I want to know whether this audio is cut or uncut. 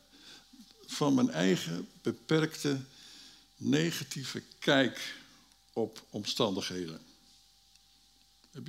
uncut